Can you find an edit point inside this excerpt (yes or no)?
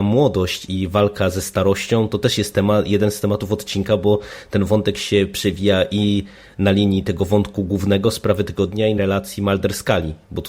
yes